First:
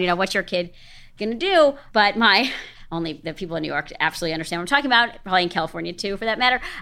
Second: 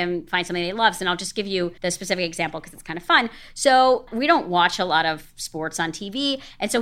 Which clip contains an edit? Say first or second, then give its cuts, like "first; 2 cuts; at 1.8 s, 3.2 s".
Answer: second; 1 cut; at 1.8 s